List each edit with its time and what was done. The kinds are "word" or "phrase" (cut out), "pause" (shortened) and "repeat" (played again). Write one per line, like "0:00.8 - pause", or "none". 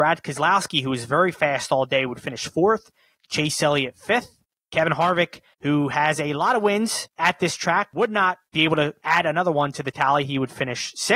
none

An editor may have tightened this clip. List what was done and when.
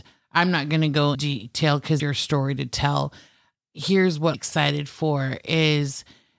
0:01.1 - word
0:02.0 - word
0:04.3 - word

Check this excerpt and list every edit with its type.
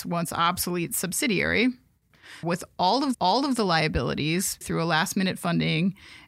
0:02.4 - phrase
0:03.1 - repeat
0:04.6 - word

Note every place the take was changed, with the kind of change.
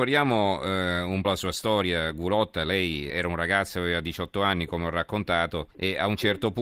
0:01.2 - word
0:03.1 - word
0:05.7 - pause

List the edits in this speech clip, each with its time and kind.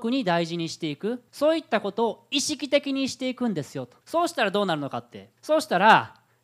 0:01.3 - pause
0:04.0 - pause
0:05.4 - pause

